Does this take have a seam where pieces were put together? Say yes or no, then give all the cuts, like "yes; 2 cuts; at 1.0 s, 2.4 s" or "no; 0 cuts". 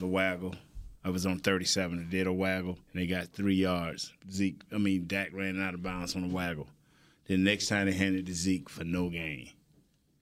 yes; 3 cuts; at 1.0 s, 2.8 s, 4.2 s